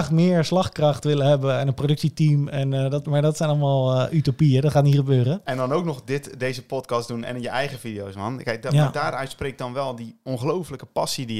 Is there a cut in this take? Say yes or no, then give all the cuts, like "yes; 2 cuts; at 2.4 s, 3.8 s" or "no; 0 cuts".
no; 0 cuts